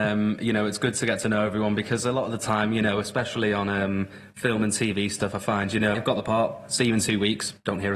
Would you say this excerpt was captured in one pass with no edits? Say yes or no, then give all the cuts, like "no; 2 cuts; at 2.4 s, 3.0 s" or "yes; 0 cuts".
no; 1 cut; at 5.9 s